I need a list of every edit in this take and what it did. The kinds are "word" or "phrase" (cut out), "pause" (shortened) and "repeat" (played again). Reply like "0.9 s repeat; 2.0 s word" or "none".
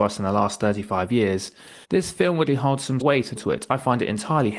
1.8 s pause; 2.5 s word; 3.0 s word; 3.4 s word